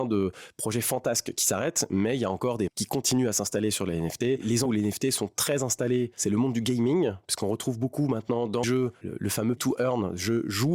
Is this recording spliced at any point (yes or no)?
yes